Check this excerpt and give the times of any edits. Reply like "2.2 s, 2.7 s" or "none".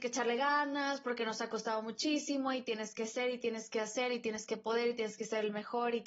none